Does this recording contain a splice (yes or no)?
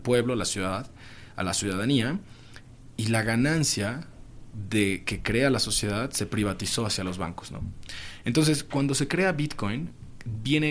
no